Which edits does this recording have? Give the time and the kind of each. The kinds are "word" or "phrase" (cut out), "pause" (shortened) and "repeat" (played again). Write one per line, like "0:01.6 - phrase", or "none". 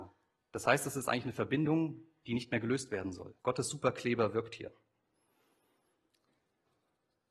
0:03.4 - pause